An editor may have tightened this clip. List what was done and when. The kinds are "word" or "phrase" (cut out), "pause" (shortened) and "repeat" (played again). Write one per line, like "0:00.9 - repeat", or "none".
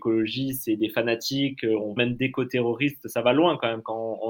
0:02.0 - word